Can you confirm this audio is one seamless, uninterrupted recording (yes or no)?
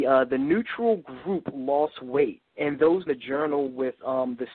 no